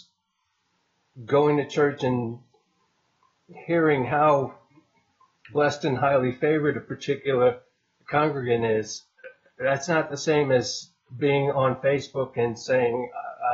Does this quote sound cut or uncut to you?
uncut